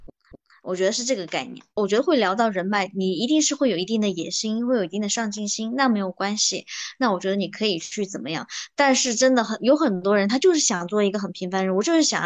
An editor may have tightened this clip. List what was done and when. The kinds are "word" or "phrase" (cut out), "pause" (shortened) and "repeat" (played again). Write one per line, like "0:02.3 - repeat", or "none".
0:01.7 - pause